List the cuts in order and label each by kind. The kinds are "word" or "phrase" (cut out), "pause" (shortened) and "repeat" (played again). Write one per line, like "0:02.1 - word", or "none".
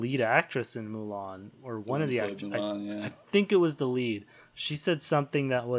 none